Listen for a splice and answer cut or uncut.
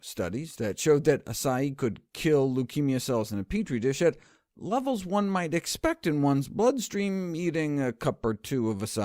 uncut